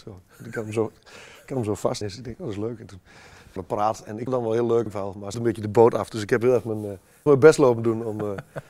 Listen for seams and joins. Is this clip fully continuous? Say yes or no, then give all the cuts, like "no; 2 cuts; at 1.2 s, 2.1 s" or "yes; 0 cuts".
no; 6 cuts; at 2.0 s, 3.6 s, 4.3 s, 4.9 s, 5.3 s, 7.3 s